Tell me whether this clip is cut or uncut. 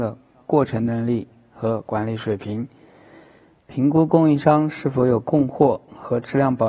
uncut